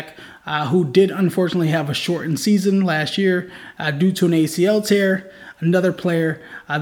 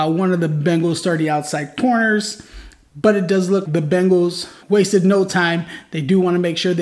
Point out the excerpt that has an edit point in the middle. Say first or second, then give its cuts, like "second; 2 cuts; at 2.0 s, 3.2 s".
second; 2 cuts; at 3.6 s, 4.6 s